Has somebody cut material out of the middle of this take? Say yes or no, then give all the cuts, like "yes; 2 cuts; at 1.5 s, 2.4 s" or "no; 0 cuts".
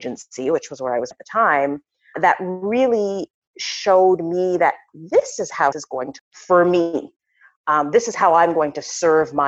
yes; 5 cuts; at 1.1 s, 2.1 s, 4.9 s, 5.7 s, 6.2 s